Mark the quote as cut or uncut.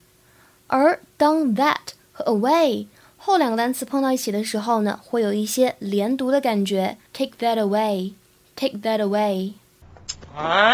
cut